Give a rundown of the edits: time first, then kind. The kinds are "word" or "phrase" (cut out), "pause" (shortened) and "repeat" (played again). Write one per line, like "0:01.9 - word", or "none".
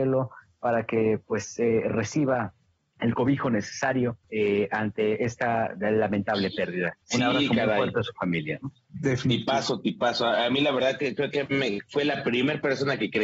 0:02.7 - pause
0:04.2 - pause
0:07.0 - pause